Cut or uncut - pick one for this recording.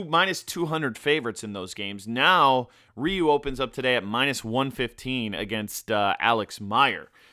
uncut